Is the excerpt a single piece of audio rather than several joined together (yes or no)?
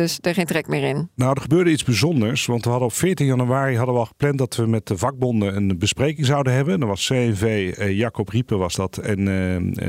yes